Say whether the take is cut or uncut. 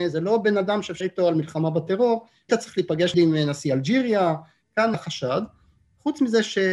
cut